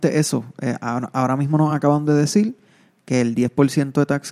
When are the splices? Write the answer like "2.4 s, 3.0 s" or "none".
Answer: none